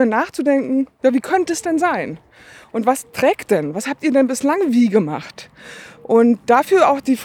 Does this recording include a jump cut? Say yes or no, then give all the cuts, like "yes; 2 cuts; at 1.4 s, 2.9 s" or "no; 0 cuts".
no; 0 cuts